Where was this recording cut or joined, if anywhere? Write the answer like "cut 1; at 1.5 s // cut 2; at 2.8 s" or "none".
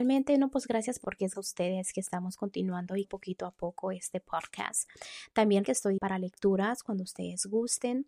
cut 1; at 1.0 s // cut 2; at 1.3 s // cut 3; at 3.0 s // cut 4; at 5.6 s // cut 5; at 6.0 s